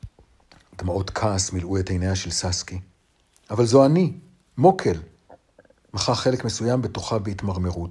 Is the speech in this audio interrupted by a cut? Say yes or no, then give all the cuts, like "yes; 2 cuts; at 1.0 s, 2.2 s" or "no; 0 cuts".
no; 0 cuts